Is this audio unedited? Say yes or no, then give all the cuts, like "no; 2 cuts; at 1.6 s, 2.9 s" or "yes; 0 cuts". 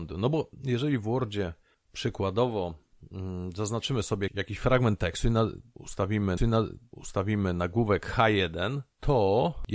no; 2 cuts; at 4.3 s, 6.4 s